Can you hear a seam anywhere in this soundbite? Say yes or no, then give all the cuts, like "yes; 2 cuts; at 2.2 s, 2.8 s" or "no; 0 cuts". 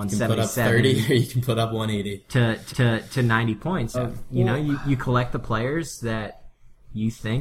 yes; 2 cuts; at 2.7 s, 3.9 s